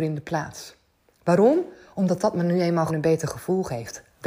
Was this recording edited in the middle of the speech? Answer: yes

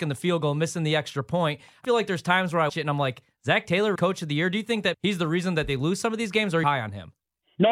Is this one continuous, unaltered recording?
no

